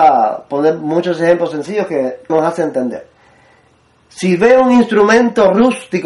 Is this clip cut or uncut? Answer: cut